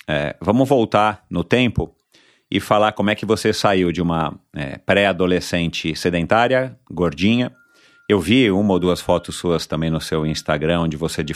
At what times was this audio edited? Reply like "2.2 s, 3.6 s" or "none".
none